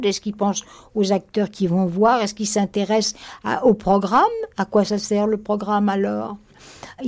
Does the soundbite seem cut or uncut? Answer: uncut